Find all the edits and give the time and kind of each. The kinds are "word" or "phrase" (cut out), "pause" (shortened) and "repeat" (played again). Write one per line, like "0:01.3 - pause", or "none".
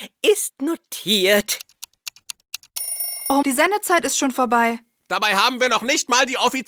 0:03.4 - word

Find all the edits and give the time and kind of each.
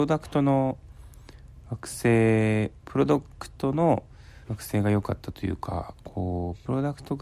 0:04.4 - pause

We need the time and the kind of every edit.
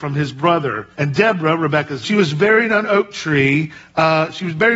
0:00.9 - pause
0:02.0 - phrase
0:02.8 - word

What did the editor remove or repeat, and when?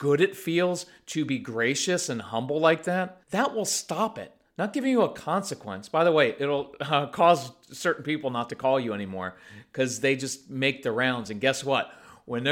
0:03.2 - pause

